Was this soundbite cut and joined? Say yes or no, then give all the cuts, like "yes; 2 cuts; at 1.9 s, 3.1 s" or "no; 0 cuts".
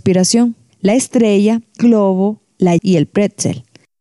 yes; 2 cuts; at 1.8 s, 2.8 s